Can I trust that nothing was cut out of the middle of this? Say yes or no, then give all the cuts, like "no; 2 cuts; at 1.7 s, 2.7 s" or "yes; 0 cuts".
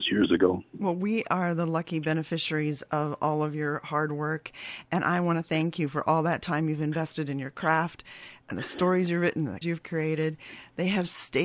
no; 1 cut; at 9.6 s